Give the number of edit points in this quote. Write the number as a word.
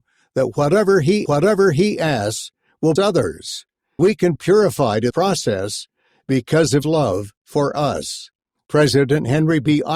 seven